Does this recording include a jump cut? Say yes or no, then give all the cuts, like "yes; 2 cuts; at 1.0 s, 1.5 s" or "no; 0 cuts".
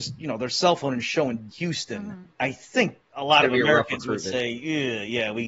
yes; 3 cuts; at 1.5 s, 2.3 s, 3.0 s